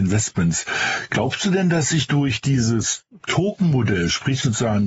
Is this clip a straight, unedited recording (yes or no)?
yes